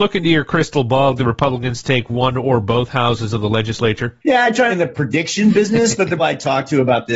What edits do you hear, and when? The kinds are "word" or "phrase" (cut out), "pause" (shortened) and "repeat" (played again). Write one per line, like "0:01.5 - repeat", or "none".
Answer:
0:01.2 - phrase
0:04.7 - phrase
0:06.2 - word

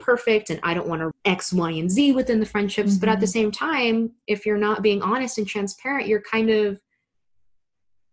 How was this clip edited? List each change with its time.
0:01.1 - word

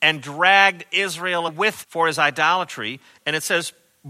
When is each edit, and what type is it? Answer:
0:01.5 - word
0:01.8 - word

